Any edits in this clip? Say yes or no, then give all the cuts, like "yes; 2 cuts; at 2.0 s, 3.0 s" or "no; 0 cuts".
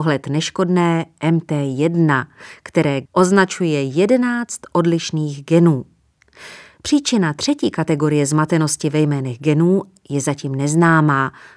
yes; 1 cut; at 3.1 s